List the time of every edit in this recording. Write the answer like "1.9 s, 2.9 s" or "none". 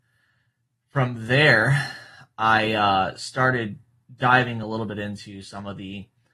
none